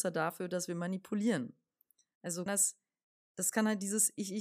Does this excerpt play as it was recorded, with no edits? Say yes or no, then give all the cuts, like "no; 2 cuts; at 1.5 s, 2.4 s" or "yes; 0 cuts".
no; 1 cut; at 2.5 s